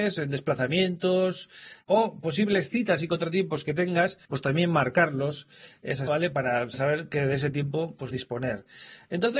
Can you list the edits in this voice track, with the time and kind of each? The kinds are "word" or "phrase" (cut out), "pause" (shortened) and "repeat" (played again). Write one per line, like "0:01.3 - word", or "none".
0:04.2 - pause
0:06.1 - word
0:08.1 - phrase